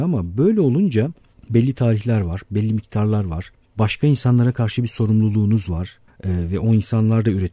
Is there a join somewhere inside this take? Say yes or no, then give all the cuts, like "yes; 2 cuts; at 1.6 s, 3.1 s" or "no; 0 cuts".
no; 0 cuts